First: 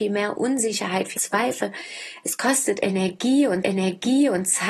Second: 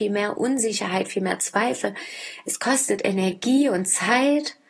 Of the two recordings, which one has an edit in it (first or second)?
first